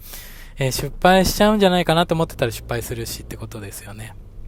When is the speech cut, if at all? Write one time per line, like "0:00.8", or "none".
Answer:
none